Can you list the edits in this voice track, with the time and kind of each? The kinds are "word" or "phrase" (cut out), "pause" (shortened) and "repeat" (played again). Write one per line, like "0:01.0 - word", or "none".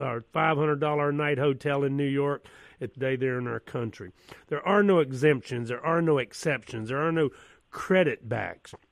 0:02.9 - phrase